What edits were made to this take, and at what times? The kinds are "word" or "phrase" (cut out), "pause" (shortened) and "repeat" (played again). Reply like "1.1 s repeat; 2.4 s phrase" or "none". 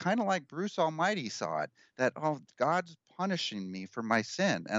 none